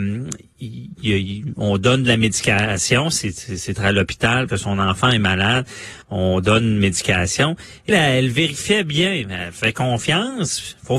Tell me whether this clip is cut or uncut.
cut